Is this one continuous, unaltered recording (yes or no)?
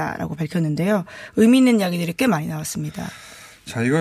yes